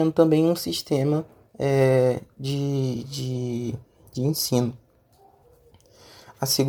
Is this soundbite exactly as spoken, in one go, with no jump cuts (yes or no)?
yes